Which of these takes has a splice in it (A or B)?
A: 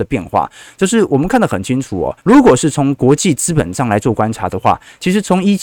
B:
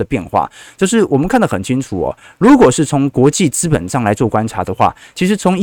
A